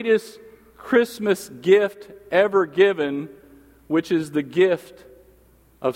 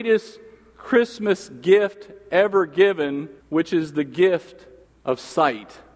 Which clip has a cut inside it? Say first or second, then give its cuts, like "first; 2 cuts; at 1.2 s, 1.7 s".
second; 2 cuts; at 3.4 s, 4.8 s